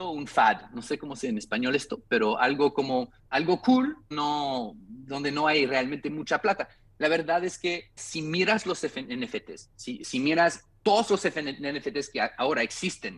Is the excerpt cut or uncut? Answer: cut